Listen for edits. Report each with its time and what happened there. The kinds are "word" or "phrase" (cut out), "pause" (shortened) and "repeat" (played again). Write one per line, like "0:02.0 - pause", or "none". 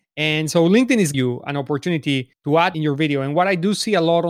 0:01.1 - word
0:02.3 - pause
0:02.7 - phrase

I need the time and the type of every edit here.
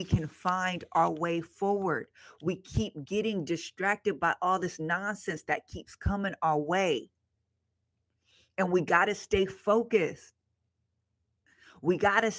none

